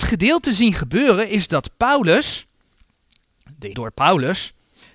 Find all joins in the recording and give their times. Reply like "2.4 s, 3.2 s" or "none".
3.7 s